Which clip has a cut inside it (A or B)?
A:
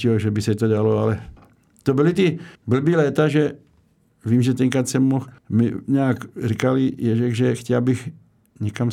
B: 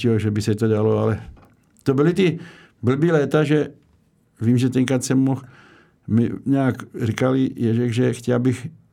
A